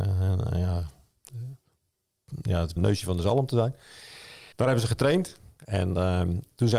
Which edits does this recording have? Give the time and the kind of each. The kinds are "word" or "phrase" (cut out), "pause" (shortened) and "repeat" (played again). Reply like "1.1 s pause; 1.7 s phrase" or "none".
2.8 s word; 4.5 s pause